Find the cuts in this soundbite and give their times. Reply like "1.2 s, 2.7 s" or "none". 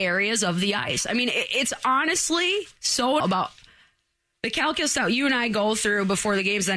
3.2 s